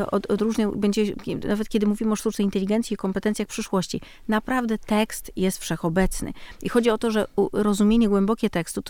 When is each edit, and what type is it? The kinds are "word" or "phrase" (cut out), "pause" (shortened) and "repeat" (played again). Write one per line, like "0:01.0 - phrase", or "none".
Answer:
none